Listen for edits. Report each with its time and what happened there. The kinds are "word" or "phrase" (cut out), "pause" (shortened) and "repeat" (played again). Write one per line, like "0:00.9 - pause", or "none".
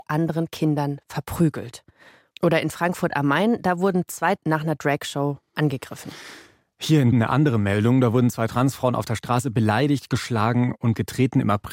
0:04.4 - word
0:07.1 - word